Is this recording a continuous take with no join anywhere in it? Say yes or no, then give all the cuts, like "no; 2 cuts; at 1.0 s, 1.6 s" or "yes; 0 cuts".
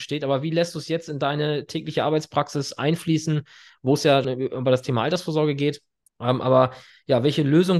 no; 2 cuts; at 4.2 s, 6.0 s